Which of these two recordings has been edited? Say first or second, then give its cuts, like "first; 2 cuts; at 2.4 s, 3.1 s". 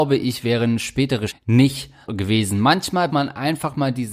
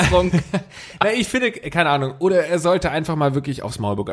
first; 3 cuts; at 1.3 s, 2.1 s, 3.1 s